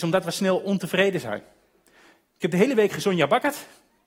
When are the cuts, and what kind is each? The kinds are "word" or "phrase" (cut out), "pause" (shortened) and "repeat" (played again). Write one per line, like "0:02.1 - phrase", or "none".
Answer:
none